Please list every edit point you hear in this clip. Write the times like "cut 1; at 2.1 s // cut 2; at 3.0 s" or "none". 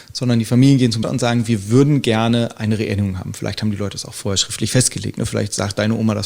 cut 1; at 1.0 s